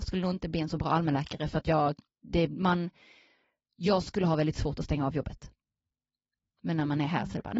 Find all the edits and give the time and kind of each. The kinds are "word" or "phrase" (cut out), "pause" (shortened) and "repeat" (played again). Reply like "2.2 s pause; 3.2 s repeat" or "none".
none